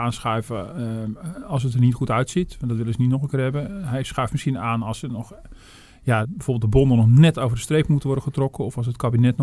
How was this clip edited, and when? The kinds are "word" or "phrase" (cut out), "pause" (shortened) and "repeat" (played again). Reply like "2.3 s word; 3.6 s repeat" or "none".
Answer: 6.2 s word